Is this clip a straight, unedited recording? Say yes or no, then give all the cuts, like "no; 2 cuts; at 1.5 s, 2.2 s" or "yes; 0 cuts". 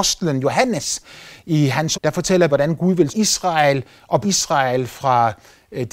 no; 4 cuts; at 1.9 s, 2.5 s, 3.1 s, 4.2 s